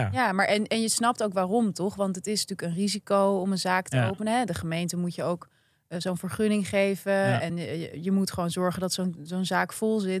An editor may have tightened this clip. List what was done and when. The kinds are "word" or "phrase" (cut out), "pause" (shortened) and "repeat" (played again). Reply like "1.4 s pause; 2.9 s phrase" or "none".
none